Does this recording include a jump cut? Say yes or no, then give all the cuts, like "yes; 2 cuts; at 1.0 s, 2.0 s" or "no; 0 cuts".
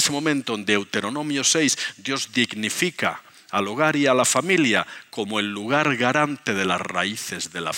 no; 0 cuts